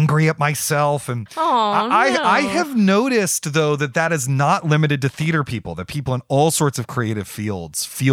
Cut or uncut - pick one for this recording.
uncut